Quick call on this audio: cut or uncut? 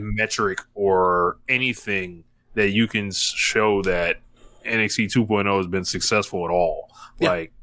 uncut